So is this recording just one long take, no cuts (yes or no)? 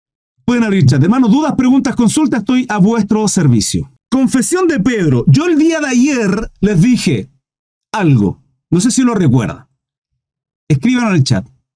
yes